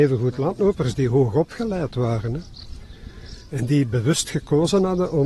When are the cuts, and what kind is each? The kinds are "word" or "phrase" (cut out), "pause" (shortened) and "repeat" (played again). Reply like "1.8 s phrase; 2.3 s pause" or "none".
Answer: none